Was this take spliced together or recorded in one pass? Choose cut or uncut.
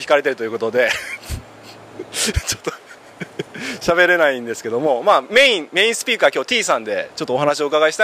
uncut